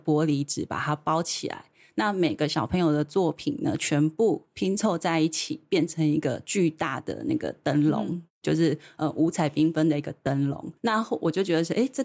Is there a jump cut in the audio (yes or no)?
yes